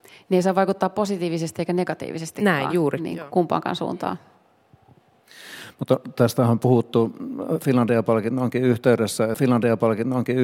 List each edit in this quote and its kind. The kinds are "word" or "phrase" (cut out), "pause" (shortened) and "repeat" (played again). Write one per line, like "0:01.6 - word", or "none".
0:09.3 - repeat